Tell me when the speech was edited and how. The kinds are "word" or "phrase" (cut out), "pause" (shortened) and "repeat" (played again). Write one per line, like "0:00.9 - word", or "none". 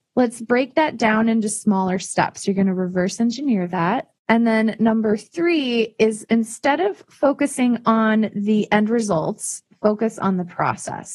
0:04.2 - pause